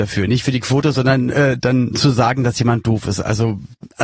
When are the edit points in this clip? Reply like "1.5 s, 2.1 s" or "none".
none